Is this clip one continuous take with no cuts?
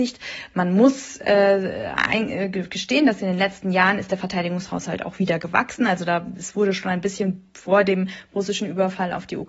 yes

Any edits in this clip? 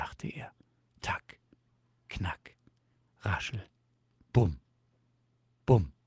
no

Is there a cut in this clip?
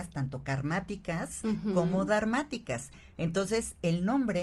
no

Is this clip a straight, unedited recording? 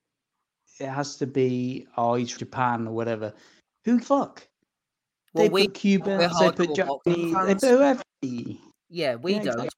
no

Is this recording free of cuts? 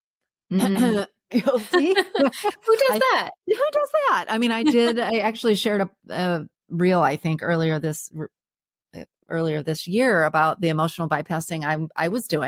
yes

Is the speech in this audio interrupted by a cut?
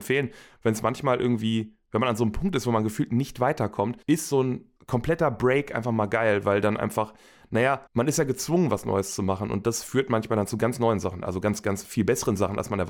yes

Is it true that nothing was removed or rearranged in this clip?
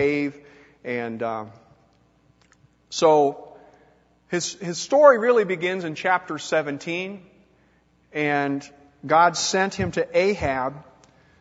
yes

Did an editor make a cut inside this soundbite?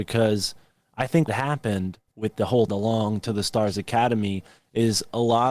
yes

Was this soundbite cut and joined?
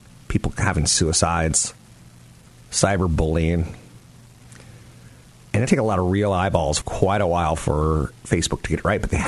yes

